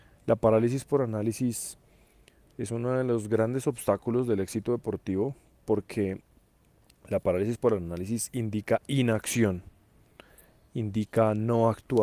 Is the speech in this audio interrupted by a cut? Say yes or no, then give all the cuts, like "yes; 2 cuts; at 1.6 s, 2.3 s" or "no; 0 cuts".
no; 0 cuts